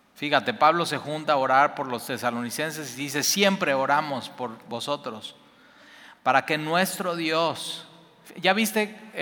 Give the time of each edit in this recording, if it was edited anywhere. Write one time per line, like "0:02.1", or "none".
none